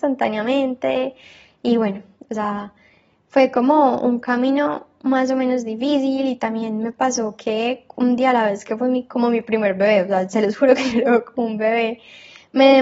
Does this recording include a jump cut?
no; 0 cuts

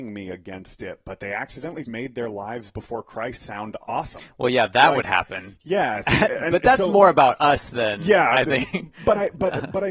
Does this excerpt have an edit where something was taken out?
yes; 1 cut; at 1.8 s

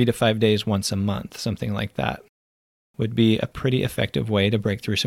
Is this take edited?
no; 0 cuts

